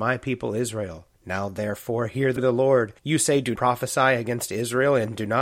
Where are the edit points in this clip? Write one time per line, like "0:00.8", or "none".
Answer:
0:01.1
0:02.4
0:03.0
0:03.6